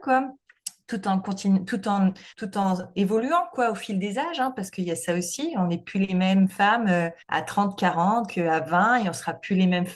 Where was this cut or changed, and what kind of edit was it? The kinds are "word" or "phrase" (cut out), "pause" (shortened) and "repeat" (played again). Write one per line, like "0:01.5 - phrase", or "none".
0:02.3 - pause
0:07.2 - pause